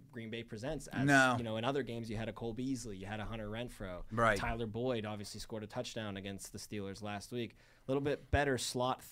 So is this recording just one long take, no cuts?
yes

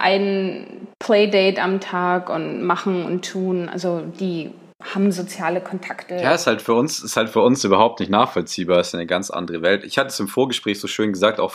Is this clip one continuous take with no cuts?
yes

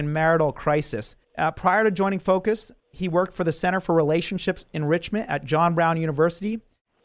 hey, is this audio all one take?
no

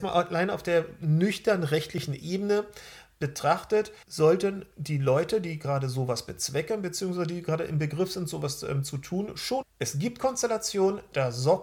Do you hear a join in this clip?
yes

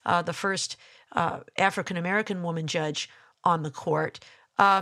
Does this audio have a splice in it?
no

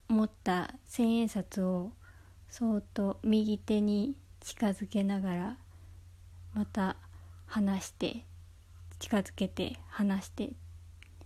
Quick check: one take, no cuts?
yes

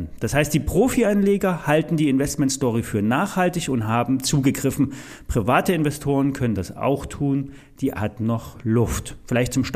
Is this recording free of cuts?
no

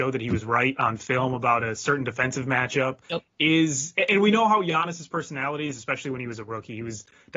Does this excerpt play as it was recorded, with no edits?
no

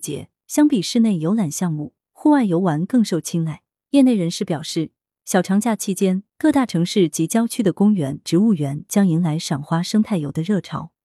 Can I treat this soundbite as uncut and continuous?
yes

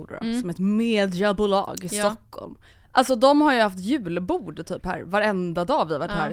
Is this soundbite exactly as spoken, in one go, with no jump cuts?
no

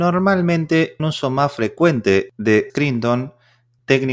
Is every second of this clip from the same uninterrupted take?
no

